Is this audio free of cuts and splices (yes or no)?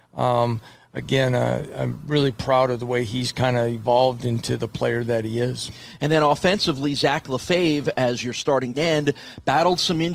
no